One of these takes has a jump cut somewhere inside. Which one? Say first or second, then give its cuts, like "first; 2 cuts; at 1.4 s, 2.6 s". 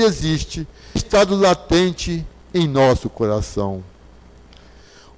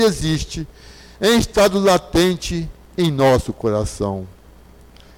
first; 1 cut; at 1.0 s